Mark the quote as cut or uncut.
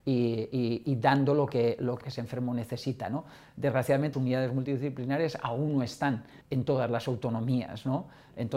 cut